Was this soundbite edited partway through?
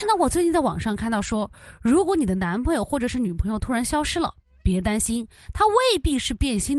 no; 0 cuts

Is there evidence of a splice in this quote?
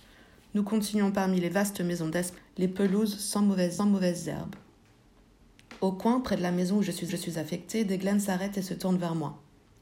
yes; 3 cuts; at 2.4 s, 3.8 s, 7.1 s

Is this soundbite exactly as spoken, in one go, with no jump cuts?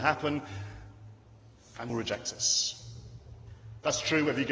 no; 1 cut; at 1.9 s

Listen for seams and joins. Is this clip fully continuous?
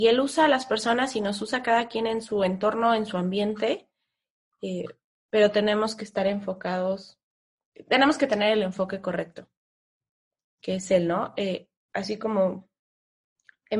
yes; 0 cuts

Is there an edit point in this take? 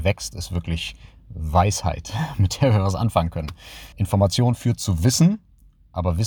yes; 1 cut; at 3.9 s

